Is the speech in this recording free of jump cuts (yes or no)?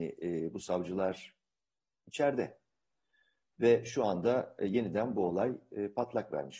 yes